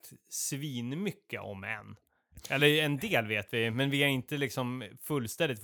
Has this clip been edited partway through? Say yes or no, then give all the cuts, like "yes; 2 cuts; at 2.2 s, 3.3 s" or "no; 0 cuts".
no; 0 cuts